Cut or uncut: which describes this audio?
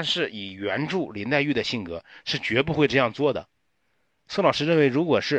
uncut